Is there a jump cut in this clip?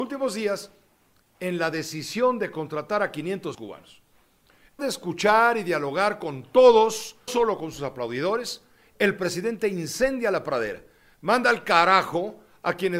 yes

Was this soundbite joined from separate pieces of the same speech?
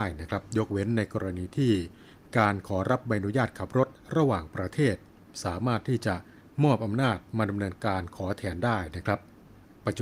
no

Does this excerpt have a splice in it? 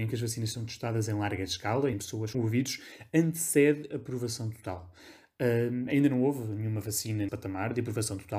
yes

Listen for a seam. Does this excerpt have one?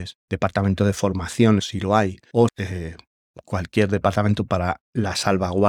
yes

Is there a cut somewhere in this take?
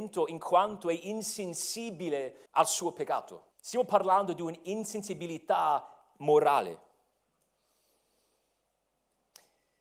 yes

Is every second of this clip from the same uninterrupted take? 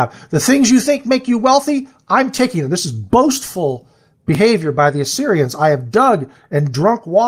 yes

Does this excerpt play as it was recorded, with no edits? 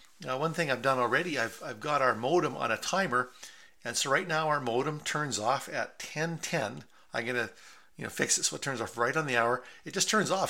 yes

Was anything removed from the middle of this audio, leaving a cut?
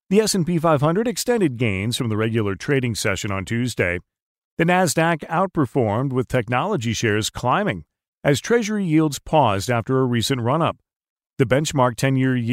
no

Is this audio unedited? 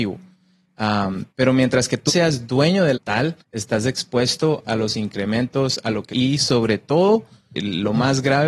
no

